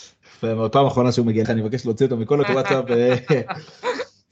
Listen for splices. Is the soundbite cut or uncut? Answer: cut